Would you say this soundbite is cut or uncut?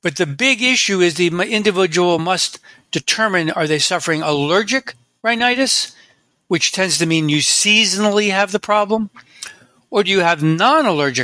uncut